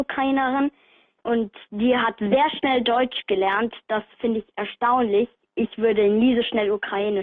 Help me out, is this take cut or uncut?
uncut